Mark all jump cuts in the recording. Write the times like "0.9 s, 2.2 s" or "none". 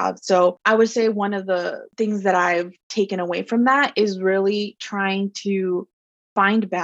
none

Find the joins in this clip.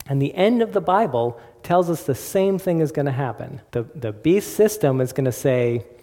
3.7 s

